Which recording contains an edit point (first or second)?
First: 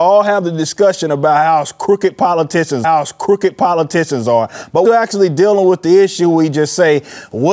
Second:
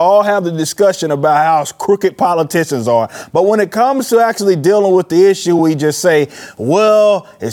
first